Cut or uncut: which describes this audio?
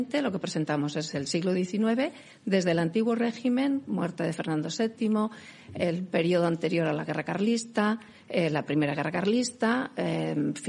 uncut